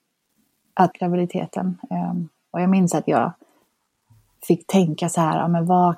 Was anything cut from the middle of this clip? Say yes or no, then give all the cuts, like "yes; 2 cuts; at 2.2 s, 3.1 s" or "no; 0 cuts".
yes; 1 cut; at 0.9 s